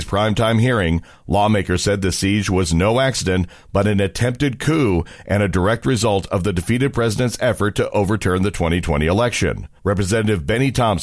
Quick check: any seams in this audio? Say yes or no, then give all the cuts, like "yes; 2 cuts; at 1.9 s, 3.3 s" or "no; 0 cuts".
yes; 1 cut; at 9.8 s